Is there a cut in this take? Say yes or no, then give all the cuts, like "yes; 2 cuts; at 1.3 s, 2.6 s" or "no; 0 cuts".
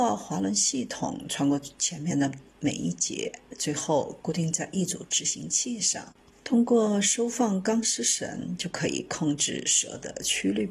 yes; 2 cuts; at 2.5 s, 6.3 s